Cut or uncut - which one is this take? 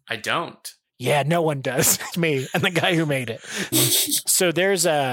cut